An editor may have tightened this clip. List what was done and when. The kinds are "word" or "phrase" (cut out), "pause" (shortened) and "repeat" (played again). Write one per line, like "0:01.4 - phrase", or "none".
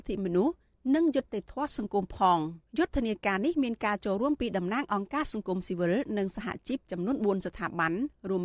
0:02.7 - pause